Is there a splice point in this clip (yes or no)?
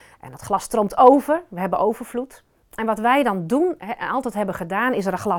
no